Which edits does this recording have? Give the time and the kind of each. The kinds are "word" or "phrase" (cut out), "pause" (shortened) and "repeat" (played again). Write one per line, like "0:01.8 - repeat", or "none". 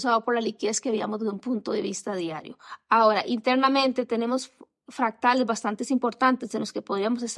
none